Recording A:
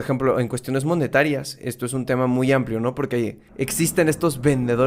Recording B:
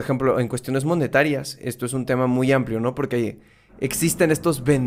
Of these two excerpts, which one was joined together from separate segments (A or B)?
A